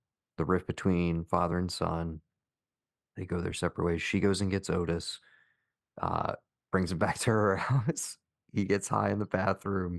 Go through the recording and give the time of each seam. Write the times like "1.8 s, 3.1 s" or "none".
none